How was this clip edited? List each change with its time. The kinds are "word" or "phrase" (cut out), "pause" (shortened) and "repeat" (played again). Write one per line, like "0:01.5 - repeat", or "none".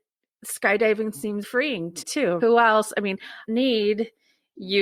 0:01.4 - word
0:02.0 - word
0:02.4 - word
0:03.5 - phrase

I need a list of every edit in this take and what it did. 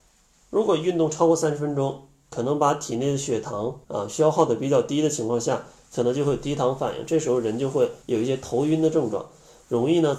0:03.8 - pause
0:08.0 - pause

